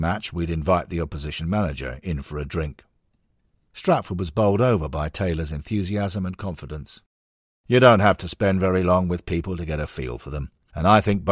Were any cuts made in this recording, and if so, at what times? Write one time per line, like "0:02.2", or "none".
none